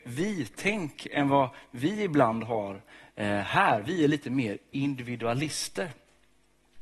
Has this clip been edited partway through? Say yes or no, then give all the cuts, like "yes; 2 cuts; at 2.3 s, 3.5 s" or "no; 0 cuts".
no; 0 cuts